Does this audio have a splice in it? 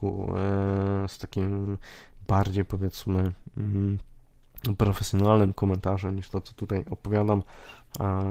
no; 0 cuts

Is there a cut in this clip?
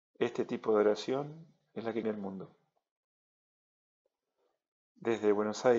yes; 1 cut; at 2.0 s

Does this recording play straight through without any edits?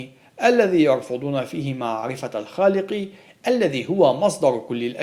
yes; 0 cuts

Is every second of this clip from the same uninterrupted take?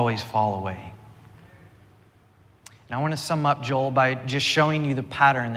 yes; 0 cuts

